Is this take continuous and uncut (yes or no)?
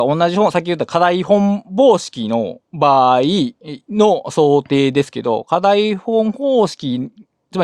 no